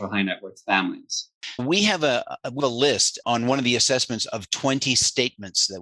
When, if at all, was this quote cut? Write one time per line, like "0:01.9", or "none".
0:01.6
0:02.6
0:03.2